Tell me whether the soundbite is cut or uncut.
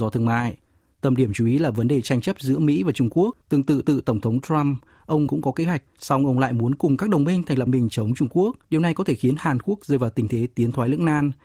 cut